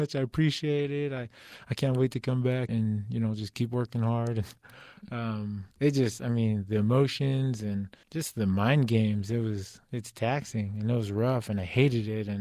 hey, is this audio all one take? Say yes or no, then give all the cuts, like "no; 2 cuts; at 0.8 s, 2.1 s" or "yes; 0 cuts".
no; 5 cuts; at 2.7 s, 3.5 s, 4.6 s, 5.7 s, 8.0 s